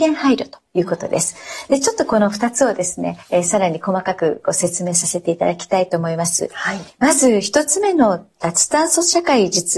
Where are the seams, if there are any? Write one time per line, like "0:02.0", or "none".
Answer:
0:03.2

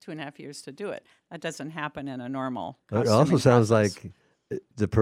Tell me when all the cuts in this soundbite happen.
none

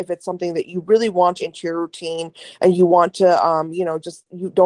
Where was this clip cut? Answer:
0:01.4

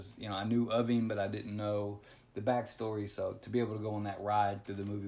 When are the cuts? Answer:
none

